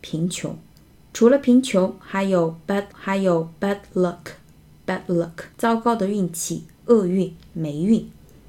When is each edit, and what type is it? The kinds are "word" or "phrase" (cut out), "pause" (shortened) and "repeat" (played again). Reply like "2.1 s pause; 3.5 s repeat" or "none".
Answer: 2.9 s repeat; 5.5 s pause

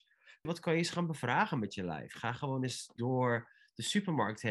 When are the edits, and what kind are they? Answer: none

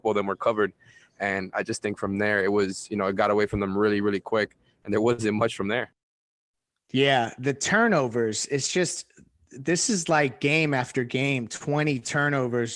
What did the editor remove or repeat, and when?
none

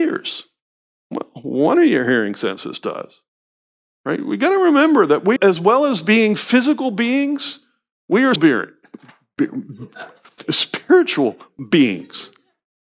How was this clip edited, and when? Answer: 5.4 s word; 8.4 s word

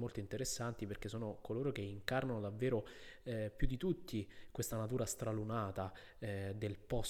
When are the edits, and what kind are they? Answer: none

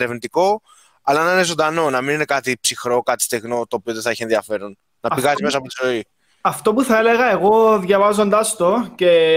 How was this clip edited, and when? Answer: none

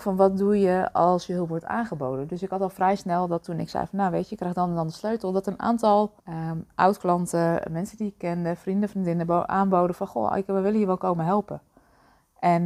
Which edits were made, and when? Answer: 6.2 s pause

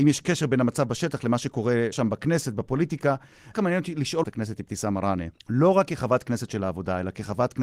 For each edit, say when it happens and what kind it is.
1.9 s word; 3.5 s word; 4.2 s phrase; 5.4 s pause

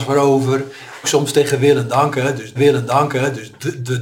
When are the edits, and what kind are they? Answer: 1.0 s word; 2.5 s repeat

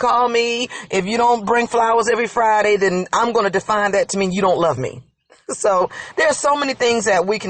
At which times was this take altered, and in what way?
none

